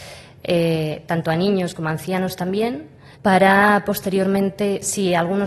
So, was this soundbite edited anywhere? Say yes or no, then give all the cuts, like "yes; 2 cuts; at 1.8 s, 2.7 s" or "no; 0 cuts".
yes; 1 cut; at 3.1 s